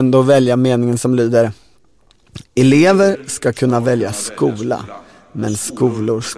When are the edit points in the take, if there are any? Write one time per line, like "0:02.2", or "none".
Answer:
none